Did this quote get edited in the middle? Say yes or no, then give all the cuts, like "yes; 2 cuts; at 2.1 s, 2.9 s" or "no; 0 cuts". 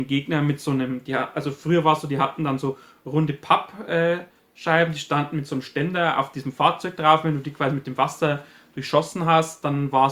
no; 0 cuts